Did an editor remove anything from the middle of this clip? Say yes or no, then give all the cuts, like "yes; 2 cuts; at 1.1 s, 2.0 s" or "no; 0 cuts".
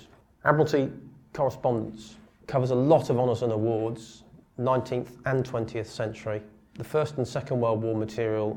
no; 0 cuts